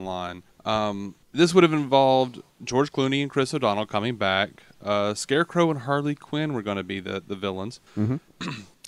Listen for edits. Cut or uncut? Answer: uncut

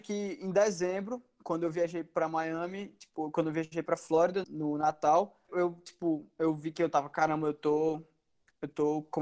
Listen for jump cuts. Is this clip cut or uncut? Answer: cut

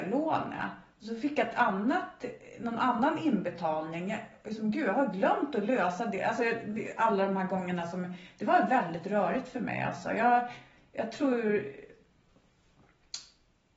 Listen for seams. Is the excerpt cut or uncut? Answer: uncut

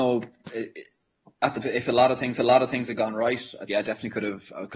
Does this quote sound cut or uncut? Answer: cut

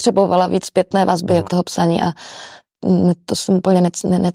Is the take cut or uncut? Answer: cut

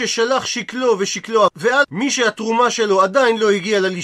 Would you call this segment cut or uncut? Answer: cut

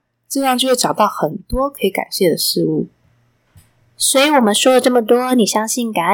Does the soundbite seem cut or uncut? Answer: uncut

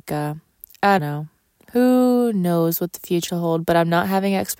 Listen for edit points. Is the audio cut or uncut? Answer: cut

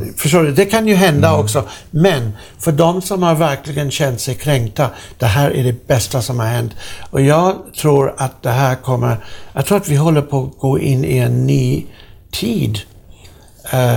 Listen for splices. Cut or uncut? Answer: uncut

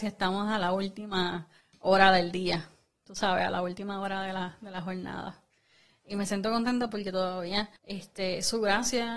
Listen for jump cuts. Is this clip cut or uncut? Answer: cut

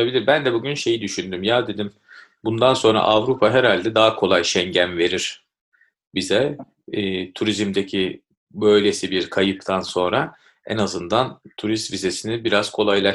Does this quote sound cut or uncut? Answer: uncut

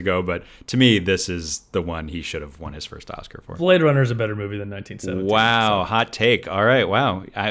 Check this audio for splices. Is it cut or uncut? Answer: uncut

